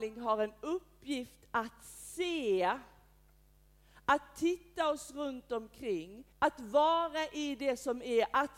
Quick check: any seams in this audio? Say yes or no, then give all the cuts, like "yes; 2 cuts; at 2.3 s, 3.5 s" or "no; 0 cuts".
yes; 1 cut; at 6.3 s